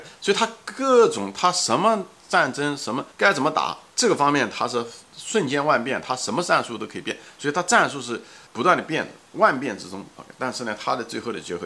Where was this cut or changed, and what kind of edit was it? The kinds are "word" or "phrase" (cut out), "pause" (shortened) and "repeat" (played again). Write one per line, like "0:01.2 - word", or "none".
0:03.1 - pause
0:03.9 - pause
0:08.5 - pause